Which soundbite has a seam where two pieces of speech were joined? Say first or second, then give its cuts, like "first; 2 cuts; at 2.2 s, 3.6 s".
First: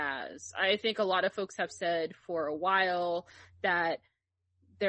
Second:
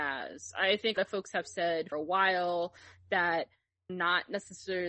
second; 3 cuts; at 1.0 s, 1.9 s, 3.9 s